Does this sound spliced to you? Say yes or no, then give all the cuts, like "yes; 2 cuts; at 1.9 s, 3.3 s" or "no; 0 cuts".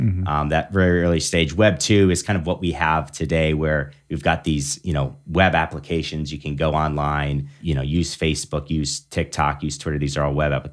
no; 0 cuts